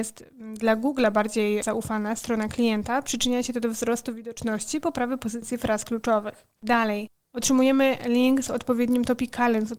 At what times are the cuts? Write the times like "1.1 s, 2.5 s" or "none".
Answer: none